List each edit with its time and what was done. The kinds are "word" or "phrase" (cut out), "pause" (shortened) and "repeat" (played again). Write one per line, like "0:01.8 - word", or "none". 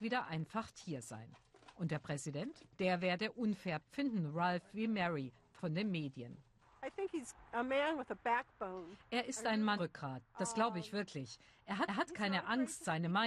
0:02.7 - pause
0:03.8 - word
0:05.6 - word
0:09.8 - word
0:11.9 - repeat

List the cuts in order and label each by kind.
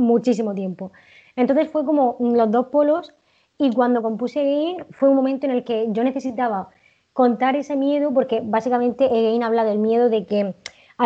none

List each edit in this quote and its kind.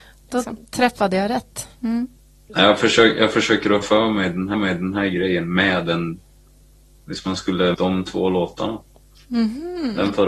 0:03.8 - word
0:04.5 - repeat
0:07.7 - phrase

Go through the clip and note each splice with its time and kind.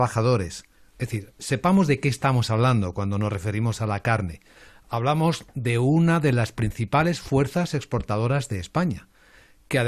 none

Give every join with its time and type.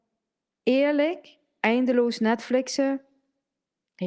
none

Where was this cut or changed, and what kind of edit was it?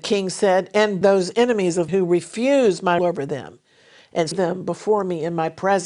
0:01.0 - word
0:01.9 - word
0:03.0 - word
0:04.3 - word

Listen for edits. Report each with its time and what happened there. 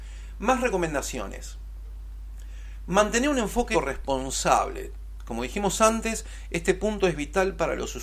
0:03.7 - word

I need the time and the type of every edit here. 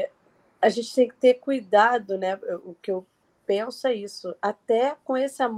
none

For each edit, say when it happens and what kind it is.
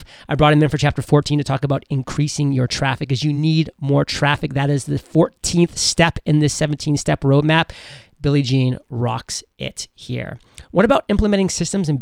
none

